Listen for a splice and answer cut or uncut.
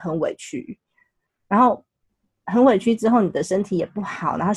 uncut